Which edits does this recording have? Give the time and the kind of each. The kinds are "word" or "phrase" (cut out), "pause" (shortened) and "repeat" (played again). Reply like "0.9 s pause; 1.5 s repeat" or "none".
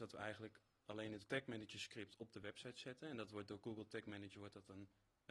1.3 s word